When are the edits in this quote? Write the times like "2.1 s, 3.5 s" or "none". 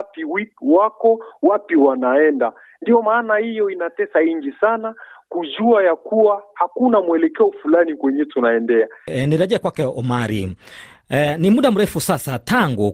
none